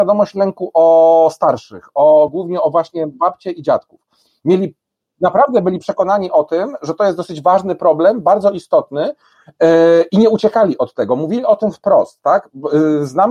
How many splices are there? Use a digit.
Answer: 0